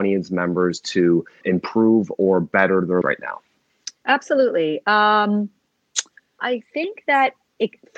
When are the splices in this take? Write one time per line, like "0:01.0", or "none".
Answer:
0:01.4
0:03.0
0:04.0
0:06.4